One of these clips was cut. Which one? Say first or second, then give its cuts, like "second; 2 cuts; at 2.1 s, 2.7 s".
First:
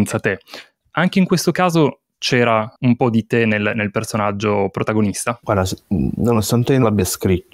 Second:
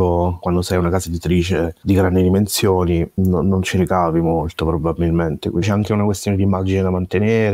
first; 1 cut; at 2.8 s